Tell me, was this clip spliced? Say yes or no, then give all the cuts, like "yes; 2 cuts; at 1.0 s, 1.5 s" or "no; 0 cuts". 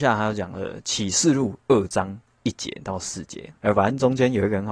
yes; 1 cut; at 3.6 s